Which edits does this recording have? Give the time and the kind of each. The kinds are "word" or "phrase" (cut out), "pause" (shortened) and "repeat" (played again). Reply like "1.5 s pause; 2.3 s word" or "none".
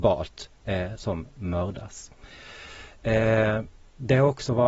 1.0 s word

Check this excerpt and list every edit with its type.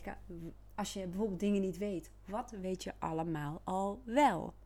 none

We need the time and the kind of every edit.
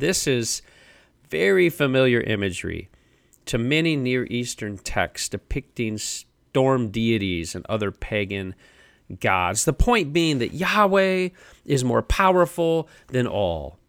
none

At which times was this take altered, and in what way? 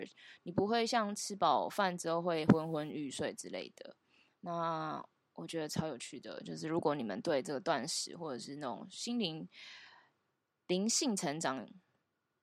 none

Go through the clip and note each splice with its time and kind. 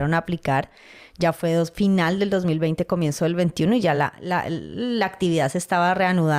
none

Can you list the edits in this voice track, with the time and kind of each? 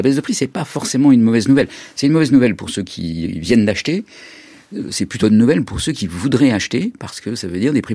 5.2 s word

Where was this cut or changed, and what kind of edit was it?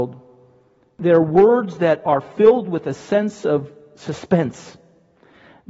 none

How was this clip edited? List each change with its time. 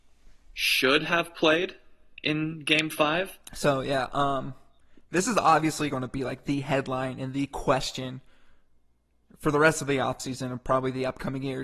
none

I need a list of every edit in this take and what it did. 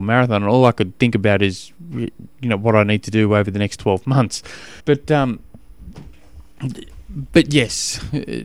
4.8 s pause

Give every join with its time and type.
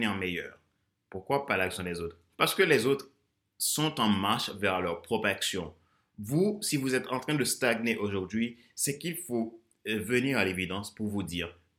none

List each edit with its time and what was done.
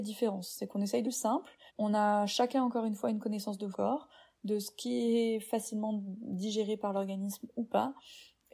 1.0 s phrase; 1.7 s pause; 3.7 s word

